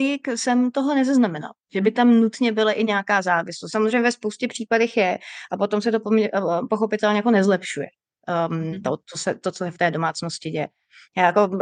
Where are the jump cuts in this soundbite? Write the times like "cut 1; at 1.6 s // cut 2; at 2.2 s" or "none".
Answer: cut 1; at 1.6 s